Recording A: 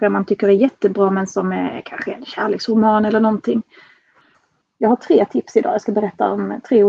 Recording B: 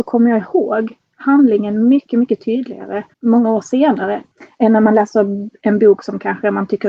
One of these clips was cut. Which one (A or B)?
B